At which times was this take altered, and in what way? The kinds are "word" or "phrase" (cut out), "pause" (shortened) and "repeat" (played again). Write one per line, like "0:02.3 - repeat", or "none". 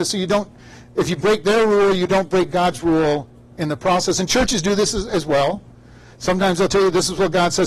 none